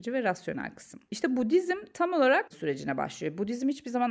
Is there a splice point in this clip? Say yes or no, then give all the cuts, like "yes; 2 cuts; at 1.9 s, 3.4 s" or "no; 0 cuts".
yes; 1 cut; at 2.5 s